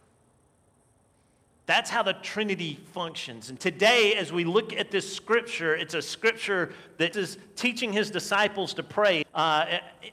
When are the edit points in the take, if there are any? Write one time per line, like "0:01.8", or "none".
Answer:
0:03.6
0:07.1
0:09.2